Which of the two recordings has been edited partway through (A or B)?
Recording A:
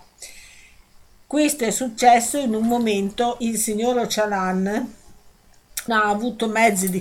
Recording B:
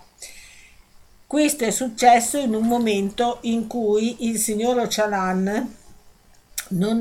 A